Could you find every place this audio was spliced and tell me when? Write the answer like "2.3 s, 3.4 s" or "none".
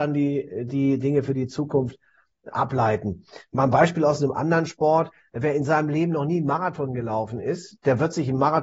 none